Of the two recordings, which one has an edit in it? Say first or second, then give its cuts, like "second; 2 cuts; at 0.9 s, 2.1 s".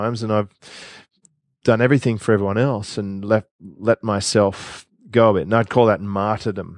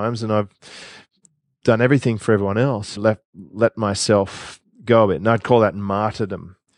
second; 1 cut; at 3.0 s